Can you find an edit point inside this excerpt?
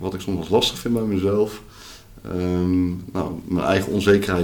no; 0 cuts

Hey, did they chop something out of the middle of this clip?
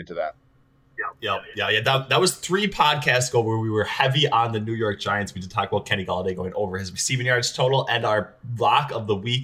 no; 0 cuts

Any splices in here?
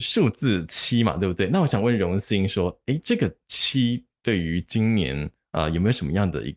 no; 0 cuts

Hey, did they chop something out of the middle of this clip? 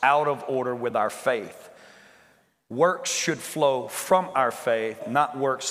no; 0 cuts

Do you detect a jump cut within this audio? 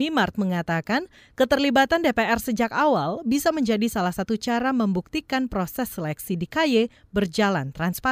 no; 0 cuts

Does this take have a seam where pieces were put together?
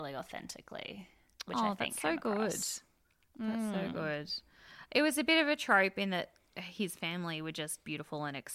no; 0 cuts

